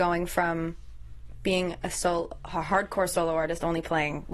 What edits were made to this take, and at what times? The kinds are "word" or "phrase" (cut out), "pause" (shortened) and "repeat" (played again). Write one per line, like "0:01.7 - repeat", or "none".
none